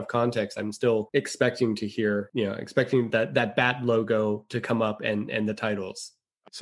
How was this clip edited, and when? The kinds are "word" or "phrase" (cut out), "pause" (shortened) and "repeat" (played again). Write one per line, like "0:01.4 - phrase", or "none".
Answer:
none